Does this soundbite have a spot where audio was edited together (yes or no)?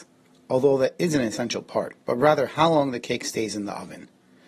yes